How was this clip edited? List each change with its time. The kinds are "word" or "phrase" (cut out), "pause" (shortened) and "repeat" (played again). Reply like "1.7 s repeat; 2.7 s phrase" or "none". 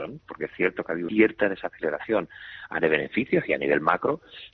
1.1 s word; 2.8 s word